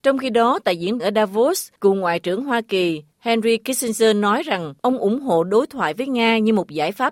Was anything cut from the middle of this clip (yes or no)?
yes